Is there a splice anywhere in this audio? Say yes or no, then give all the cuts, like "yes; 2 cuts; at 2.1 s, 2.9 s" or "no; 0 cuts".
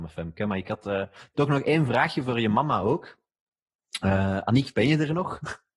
no; 0 cuts